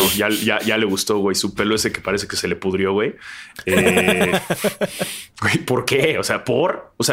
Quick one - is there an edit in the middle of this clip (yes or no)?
no